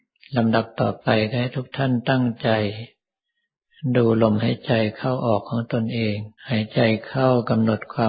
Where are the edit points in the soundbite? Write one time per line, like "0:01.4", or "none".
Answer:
0:06.4